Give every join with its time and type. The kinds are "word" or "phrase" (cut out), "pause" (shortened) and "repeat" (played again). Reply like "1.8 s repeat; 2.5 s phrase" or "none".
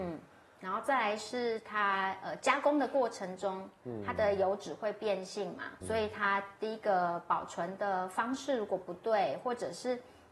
5.8 s word